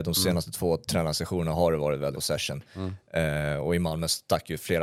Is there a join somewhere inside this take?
yes; 1 cut; at 2.1 s

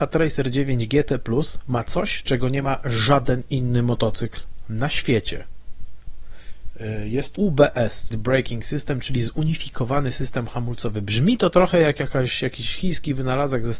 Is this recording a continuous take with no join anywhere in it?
no; 2 cuts; at 7.4 s, 8.1 s

